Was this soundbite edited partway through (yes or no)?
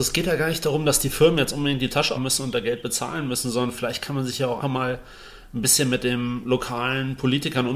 yes